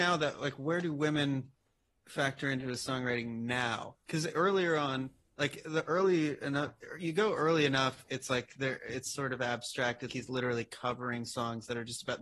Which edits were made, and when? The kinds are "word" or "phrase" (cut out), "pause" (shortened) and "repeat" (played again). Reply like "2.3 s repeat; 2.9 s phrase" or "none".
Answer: 10.1 s word